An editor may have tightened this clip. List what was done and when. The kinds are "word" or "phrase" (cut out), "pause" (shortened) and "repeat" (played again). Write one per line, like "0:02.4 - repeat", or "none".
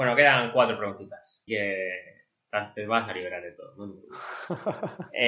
0:01.5 - word